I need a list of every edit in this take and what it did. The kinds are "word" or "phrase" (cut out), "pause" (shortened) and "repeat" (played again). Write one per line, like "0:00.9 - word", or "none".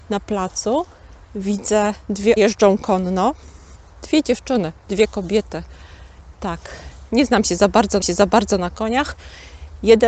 0:02.4 - phrase
0:08.0 - repeat